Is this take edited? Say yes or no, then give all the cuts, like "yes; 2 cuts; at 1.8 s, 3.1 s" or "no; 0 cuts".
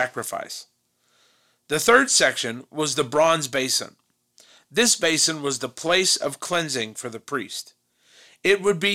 no; 0 cuts